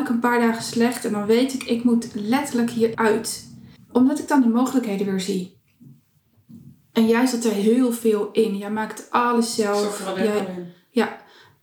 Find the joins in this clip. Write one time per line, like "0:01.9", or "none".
0:02.9
0:03.8